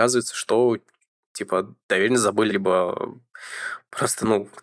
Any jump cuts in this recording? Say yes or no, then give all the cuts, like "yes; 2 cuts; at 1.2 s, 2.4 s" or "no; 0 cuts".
yes; 1 cut; at 2.5 s